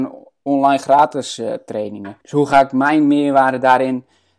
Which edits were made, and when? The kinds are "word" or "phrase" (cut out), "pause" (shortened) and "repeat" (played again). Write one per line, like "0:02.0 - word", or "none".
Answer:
0:02.2 - pause